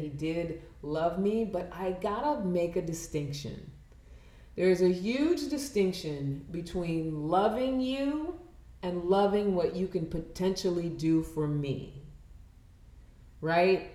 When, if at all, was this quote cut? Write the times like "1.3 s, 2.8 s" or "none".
none